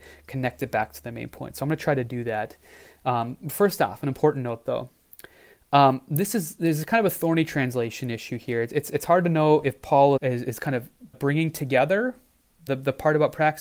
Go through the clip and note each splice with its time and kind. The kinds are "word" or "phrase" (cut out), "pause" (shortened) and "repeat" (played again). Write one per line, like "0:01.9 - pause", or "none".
0:10.2 - word
0:11.1 - word
0:12.7 - word